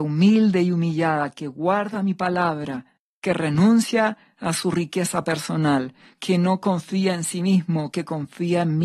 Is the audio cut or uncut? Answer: uncut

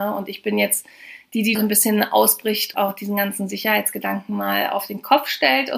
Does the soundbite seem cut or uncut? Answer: cut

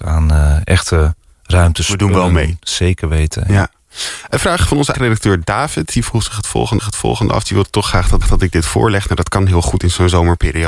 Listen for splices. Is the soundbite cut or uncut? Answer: cut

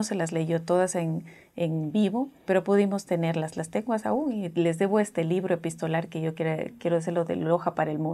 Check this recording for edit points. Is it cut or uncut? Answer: cut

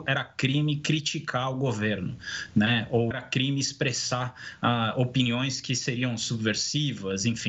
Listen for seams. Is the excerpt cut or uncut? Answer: cut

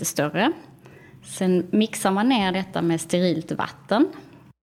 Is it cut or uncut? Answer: uncut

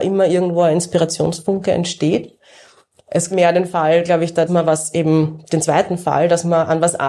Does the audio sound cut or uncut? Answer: cut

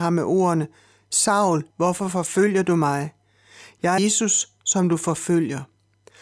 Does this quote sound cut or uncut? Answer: cut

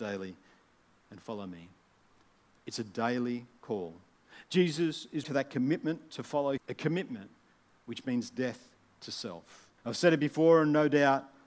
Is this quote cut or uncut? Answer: cut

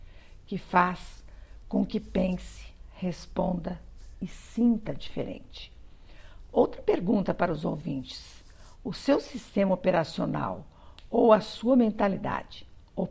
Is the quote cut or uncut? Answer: uncut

